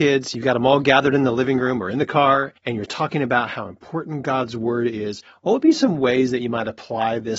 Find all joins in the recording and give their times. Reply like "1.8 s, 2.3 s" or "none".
2.6 s